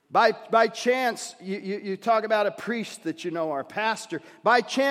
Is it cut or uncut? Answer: uncut